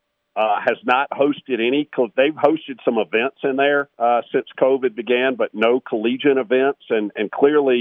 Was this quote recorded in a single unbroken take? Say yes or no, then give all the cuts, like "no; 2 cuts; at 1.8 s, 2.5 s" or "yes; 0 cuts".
no; 1 cut; at 3.9 s